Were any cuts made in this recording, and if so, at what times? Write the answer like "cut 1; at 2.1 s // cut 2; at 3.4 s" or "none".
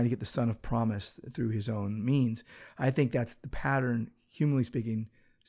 none